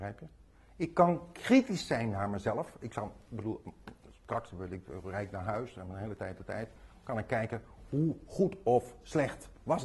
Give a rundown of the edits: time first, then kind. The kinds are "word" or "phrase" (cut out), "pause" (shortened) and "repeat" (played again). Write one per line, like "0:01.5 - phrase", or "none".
none